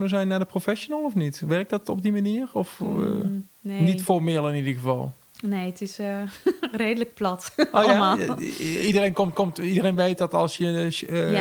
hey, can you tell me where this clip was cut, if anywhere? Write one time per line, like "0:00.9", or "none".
0:03.5
0:09.3